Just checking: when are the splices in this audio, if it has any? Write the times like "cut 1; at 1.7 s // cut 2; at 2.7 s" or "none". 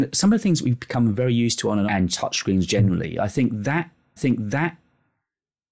cut 1; at 1.9 s // cut 2; at 4.2 s